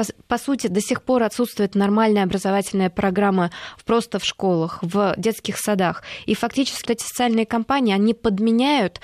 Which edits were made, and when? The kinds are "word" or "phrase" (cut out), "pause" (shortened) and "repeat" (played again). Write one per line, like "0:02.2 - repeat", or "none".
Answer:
0:06.8 - word